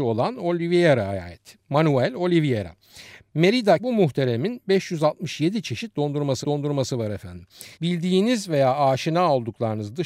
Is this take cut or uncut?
cut